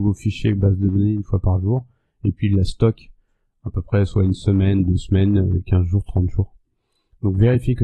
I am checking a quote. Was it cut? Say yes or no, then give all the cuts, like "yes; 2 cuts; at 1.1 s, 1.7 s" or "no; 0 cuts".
no; 0 cuts